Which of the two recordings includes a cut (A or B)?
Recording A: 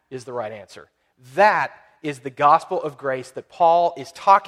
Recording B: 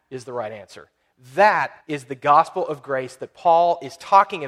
B